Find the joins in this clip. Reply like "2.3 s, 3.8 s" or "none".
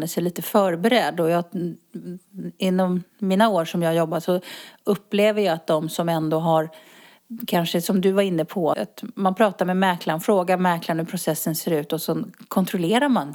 3.1 s, 8.7 s